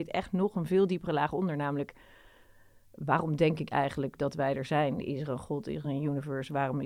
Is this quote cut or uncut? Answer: uncut